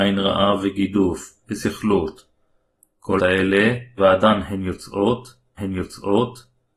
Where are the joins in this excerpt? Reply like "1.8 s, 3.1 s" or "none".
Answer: 1.4 s, 3.2 s, 4.0 s, 5.6 s